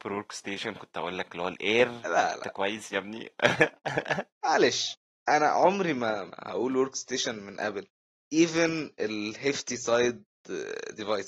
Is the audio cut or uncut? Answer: uncut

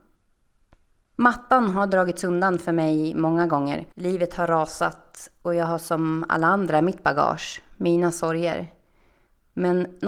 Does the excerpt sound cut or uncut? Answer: cut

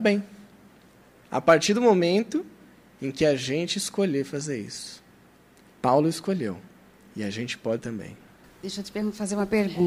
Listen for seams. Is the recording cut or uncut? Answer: cut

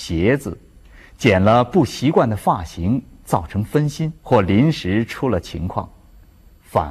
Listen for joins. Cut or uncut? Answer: cut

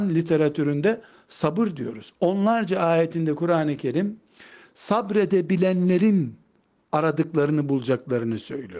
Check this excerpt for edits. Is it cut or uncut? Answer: uncut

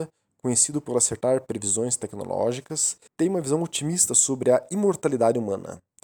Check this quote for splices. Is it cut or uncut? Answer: cut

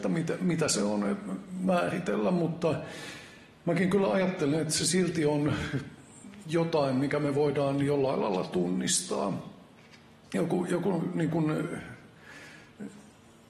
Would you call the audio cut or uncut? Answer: uncut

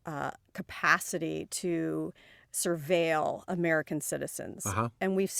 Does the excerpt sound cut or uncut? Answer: uncut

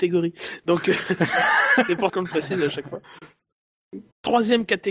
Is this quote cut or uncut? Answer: cut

